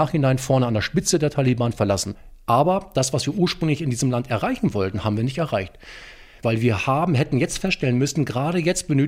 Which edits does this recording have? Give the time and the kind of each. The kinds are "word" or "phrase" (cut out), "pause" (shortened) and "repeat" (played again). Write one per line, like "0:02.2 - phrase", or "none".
none